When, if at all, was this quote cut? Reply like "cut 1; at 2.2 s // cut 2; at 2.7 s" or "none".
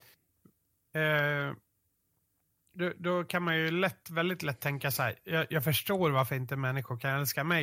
none